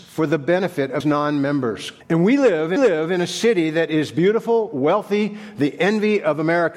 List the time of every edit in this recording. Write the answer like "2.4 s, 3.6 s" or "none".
1.0 s, 2.0 s, 2.8 s